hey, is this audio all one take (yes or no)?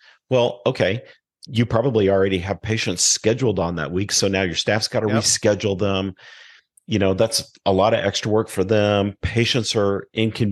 yes